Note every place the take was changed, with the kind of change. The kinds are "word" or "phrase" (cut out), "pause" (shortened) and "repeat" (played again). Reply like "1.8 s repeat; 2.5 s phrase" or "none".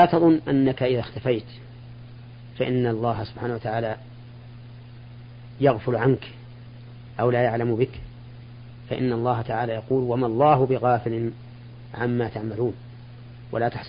none